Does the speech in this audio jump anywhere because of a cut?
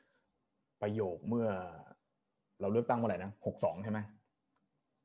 no; 0 cuts

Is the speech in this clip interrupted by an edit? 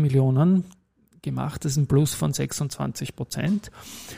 no; 0 cuts

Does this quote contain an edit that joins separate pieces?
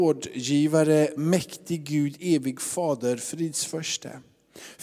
no; 0 cuts

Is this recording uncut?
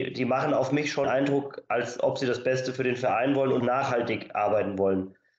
no; 2 cuts; at 1.0 s, 3.6 s

